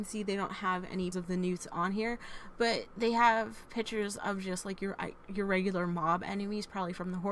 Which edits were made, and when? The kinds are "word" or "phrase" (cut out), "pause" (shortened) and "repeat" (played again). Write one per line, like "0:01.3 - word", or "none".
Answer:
0:01.1 - word